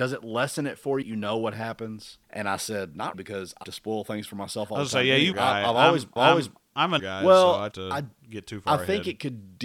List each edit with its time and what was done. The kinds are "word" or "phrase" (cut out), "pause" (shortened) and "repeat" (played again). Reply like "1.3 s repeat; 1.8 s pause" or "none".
1.0 s phrase; 2.2 s pause; 3.1 s word; 3.6 s word; 5.3 s phrase; 6.2 s repeat; 7.0 s word; 7.7 s phrase